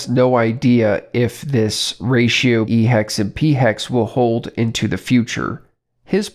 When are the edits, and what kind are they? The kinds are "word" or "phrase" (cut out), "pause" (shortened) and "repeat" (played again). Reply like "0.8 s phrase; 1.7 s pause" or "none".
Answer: 2.6 s word